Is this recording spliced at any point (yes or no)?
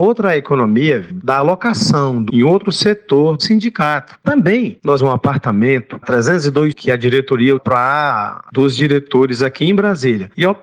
yes